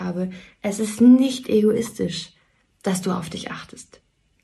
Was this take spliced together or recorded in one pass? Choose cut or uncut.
uncut